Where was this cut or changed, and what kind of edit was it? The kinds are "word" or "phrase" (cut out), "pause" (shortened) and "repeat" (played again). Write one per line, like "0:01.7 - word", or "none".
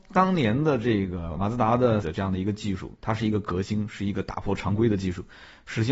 0:02.0 - word